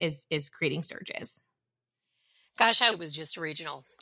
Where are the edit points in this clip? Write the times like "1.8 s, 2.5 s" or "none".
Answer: 2.9 s